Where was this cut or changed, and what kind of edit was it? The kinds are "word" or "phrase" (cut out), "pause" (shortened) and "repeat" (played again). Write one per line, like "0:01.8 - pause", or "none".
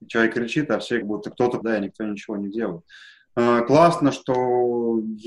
0:01.0 - word
0:01.6 - word